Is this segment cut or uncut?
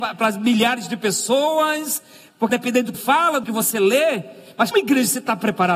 cut